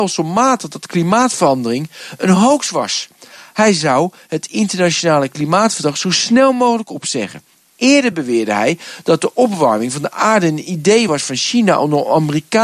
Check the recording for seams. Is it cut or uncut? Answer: uncut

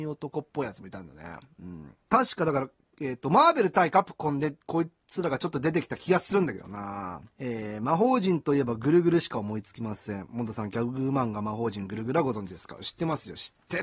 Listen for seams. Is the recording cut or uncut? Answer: cut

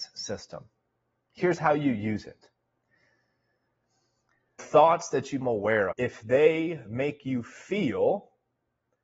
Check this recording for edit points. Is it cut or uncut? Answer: cut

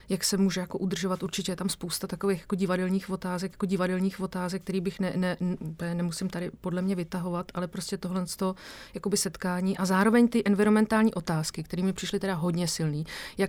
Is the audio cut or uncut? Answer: cut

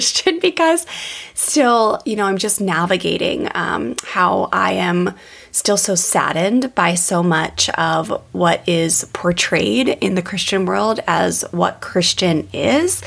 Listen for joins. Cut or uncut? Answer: uncut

